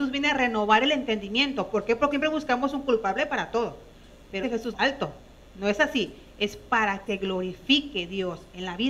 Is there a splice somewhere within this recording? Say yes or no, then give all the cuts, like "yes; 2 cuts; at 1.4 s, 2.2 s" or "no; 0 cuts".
yes; 4 cuts; at 2.1 s, 4.4 s, 4.7 s, 7.1 s